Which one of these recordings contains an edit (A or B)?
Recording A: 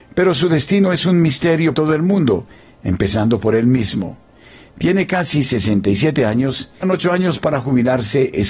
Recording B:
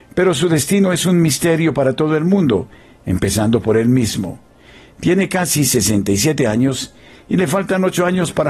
A